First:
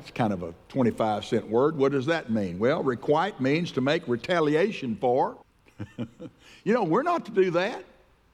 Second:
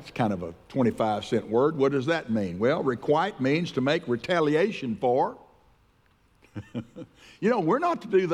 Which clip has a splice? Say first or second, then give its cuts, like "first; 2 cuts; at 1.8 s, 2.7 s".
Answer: first; 1 cut; at 5.4 s